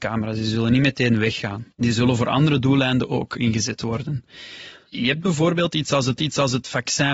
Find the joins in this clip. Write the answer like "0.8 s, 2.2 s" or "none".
1.7 s, 6.2 s